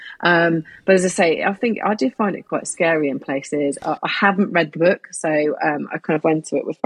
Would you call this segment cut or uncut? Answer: uncut